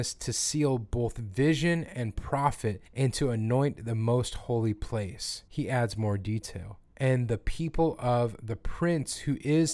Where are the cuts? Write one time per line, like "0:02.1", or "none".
0:02.9
0:05.5
0:06.9